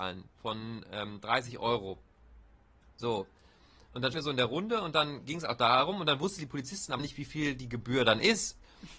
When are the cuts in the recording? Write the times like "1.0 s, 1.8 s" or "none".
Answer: 4.1 s, 7.0 s

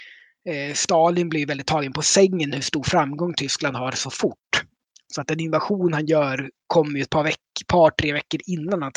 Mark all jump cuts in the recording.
none

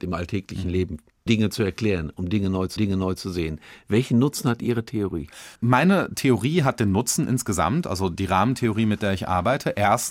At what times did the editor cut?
1.3 s, 2.8 s, 5.6 s

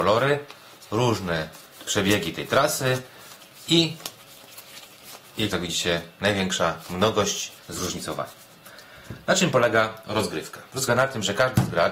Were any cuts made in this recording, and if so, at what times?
5.5 s, 7.6 s, 10.9 s

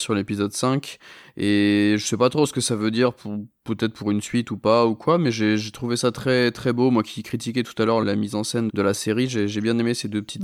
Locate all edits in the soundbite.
8.0 s, 8.7 s

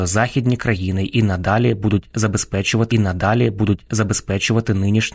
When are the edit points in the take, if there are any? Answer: 2.9 s

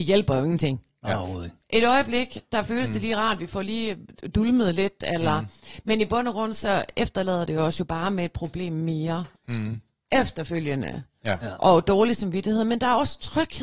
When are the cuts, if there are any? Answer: 9.4 s

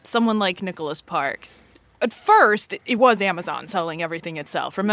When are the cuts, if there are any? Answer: none

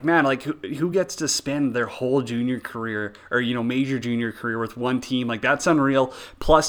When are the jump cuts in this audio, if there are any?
none

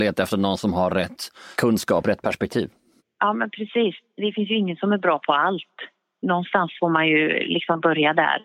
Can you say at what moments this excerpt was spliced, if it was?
none

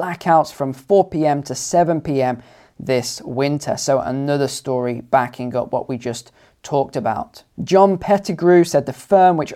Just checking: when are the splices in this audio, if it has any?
none

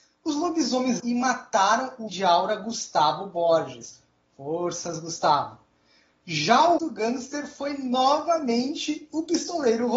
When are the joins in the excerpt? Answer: 1.0 s, 2.1 s, 6.8 s

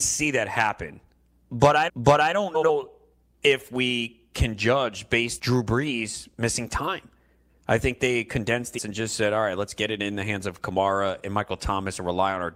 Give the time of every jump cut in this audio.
1.9 s, 5.4 s, 8.8 s

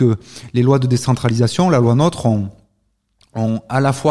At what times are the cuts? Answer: none

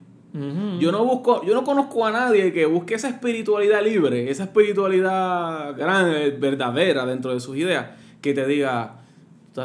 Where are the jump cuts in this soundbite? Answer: none

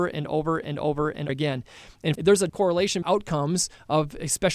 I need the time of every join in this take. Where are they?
1.3 s, 2.2 s, 2.5 s, 3.0 s

